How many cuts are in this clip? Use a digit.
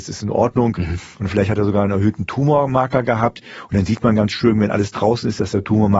0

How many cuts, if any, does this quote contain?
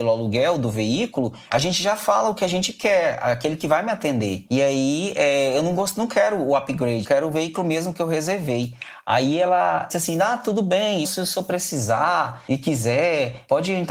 3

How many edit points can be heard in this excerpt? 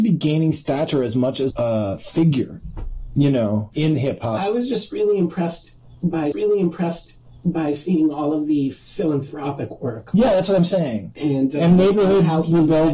3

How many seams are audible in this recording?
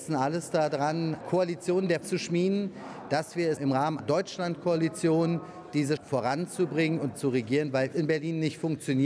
7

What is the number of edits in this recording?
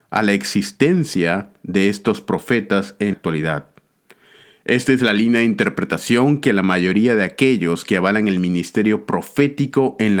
1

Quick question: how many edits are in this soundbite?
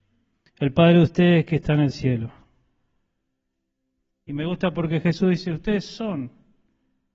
0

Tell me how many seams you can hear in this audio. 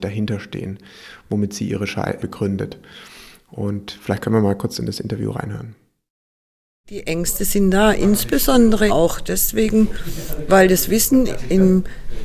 2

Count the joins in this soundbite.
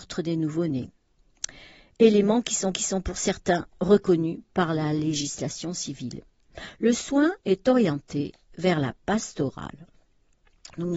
3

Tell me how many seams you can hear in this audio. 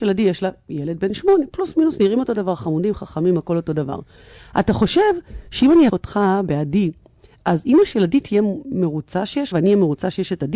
2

